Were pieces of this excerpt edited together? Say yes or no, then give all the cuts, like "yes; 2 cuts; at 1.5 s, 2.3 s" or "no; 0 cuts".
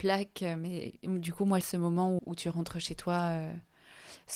yes; 2 cuts; at 1.6 s, 2.2 s